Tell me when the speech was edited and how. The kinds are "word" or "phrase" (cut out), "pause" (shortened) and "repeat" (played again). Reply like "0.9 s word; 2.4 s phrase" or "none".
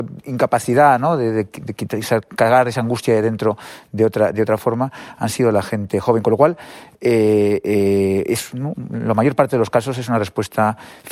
none